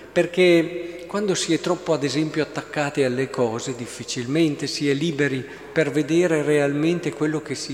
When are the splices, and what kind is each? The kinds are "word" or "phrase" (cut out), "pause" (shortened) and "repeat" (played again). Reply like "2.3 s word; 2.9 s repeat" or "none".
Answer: none